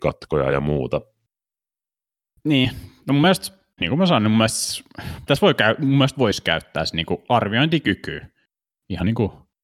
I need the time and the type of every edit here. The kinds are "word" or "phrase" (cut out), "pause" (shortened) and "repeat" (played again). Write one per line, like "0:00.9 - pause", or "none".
0:03.8 - word
0:05.3 - word
0:06.1 - word